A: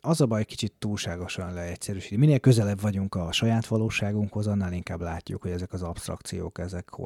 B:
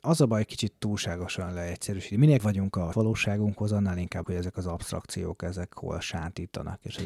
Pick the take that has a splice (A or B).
B